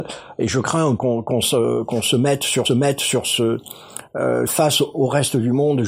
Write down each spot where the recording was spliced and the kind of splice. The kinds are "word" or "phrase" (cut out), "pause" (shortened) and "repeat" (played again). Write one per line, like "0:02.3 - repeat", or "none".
0:01.0 - phrase
0:02.6 - repeat
0:04.5 - phrase